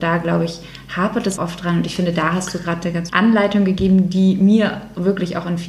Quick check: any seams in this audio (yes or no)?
yes